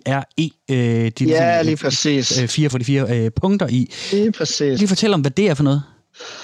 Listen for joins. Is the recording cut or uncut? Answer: cut